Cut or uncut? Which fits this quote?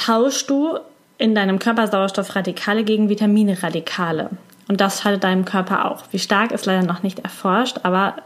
uncut